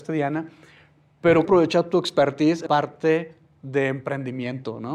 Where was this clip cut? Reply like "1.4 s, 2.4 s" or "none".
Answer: 1.5 s, 2.7 s